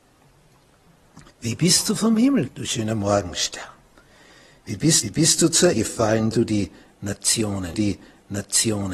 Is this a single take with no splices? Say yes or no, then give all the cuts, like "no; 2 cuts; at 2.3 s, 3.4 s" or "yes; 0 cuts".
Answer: no; 6 cuts; at 1.3 s, 2.5 s, 5.0 s, 5.7 s, 6.3 s, 7.7 s